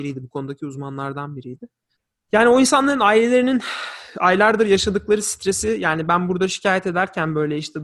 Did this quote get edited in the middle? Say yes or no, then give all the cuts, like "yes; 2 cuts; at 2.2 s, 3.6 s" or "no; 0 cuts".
yes; 1 cut; at 1.9 s